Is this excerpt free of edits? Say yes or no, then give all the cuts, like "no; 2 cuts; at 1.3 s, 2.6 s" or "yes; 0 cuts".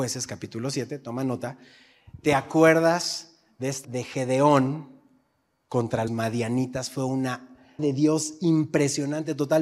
no; 3 cuts; at 3.8 s, 6.1 s, 7.8 s